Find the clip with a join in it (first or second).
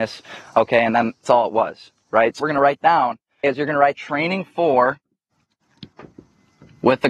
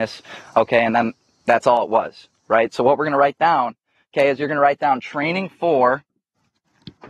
first